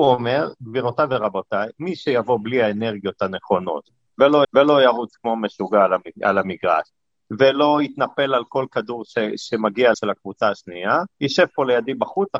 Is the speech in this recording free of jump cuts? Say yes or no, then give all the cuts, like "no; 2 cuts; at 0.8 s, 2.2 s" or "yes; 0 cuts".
no; 3 cuts; at 4.4 s, 9.9 s, 11.1 s